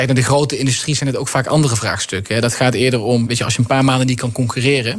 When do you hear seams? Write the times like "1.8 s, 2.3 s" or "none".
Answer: 3.3 s